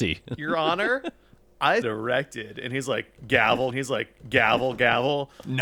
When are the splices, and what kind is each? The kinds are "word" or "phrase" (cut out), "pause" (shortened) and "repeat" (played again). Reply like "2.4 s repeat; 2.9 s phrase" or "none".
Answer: 1.8 s word; 3.7 s repeat